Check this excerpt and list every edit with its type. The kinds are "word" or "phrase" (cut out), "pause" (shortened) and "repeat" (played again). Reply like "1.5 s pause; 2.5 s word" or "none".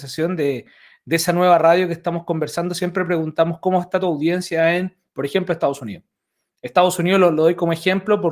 none